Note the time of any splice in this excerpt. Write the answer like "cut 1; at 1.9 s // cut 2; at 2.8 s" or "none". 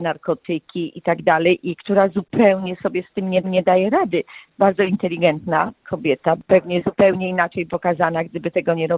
cut 1; at 3.4 s // cut 2; at 7.7 s